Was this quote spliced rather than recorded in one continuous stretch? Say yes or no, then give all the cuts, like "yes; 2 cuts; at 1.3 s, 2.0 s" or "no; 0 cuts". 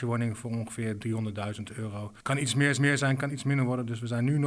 yes; 2 cuts; at 2.2 s, 2.8 s